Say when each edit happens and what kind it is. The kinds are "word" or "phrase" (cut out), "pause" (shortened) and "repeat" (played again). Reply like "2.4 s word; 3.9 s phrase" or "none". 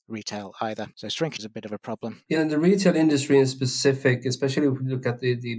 1.4 s word; 2.4 s word